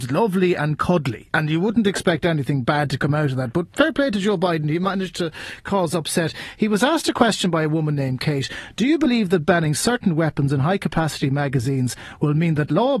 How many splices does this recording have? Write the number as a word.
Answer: one